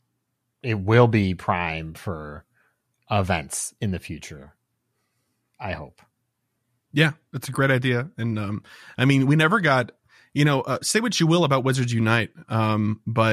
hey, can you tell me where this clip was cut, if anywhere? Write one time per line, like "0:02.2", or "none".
none